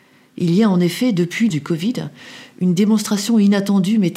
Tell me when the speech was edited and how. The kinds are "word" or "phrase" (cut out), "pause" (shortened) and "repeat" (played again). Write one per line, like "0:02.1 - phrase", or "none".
0:01.5 - word